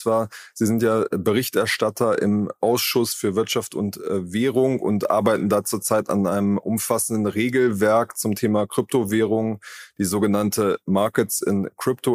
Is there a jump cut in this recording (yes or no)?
no